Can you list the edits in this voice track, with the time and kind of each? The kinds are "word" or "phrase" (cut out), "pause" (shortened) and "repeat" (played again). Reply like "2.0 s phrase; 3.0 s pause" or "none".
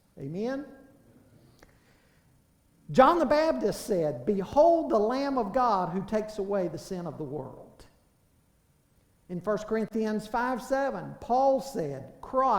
none